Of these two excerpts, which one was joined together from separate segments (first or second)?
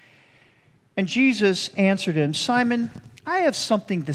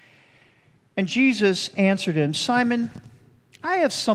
first